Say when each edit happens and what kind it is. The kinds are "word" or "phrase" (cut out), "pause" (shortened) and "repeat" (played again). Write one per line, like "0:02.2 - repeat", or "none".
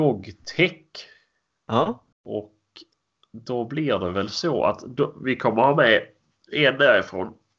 0:02.1 - pause